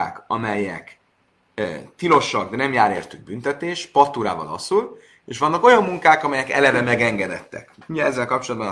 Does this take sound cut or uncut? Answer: uncut